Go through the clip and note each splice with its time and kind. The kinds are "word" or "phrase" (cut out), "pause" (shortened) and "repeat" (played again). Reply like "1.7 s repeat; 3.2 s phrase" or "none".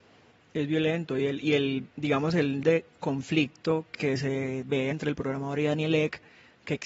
1.9 s pause; 2.6 s word; 4.9 s word